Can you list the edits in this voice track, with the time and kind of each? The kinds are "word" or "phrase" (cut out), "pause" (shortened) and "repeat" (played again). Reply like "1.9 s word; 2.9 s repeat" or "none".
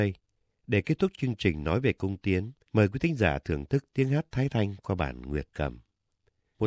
2.6 s pause

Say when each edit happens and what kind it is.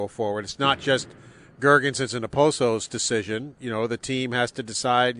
none

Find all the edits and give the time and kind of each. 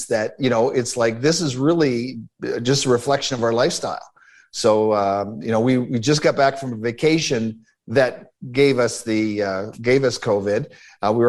none

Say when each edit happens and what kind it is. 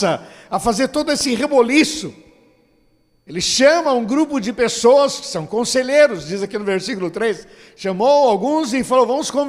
none

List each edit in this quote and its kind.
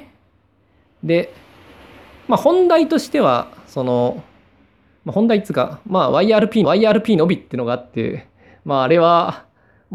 6.6 s repeat

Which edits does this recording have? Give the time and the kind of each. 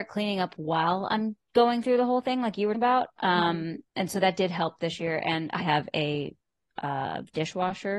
1.4 s pause; 2.7 s word; 3.9 s pause; 5.6 s word

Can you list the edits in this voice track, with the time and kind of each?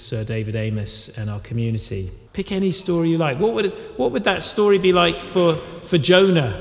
2.3 s pause

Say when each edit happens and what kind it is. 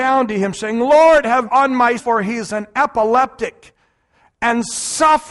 1.4 s word; 2.0 s word

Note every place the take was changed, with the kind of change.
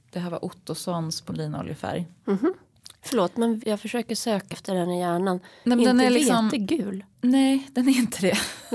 1.3 s word; 3.6 s word; 4.5 s word; 7.1 s pause

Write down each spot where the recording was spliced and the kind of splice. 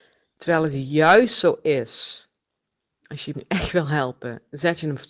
3.3 s phrase

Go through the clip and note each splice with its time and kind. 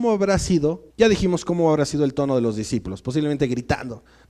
0.9 s pause

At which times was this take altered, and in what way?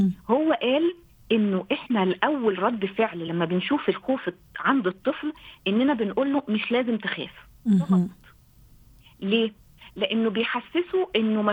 none

